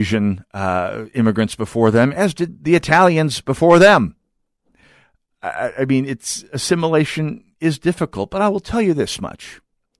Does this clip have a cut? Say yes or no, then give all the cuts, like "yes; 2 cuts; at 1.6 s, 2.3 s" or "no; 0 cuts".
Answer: no; 0 cuts